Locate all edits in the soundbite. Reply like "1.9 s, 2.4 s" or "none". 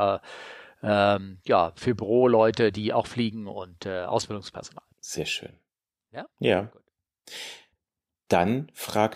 4.9 s, 6.3 s